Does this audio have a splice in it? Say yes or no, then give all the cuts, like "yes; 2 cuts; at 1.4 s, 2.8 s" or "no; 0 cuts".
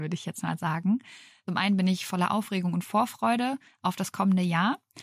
no; 0 cuts